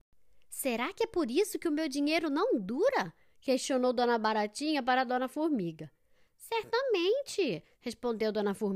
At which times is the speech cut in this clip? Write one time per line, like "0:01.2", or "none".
none